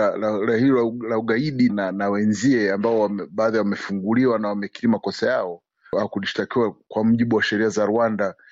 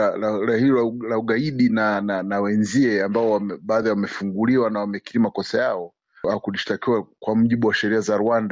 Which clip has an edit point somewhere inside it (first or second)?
first